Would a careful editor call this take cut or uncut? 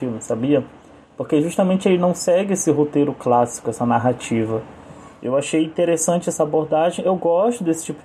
uncut